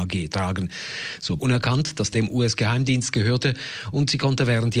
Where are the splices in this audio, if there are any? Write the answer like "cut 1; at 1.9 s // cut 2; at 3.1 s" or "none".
cut 1; at 1.4 s // cut 2; at 2.1 s